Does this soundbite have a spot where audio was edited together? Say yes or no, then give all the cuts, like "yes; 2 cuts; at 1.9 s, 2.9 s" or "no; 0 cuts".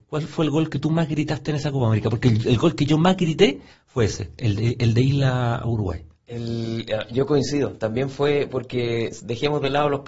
no; 0 cuts